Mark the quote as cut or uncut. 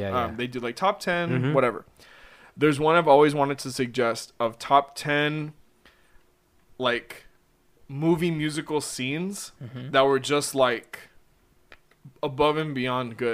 uncut